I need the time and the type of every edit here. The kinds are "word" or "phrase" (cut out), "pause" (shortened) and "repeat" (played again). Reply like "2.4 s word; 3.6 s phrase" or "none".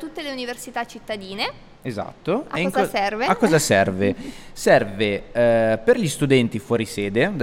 1.8 s pause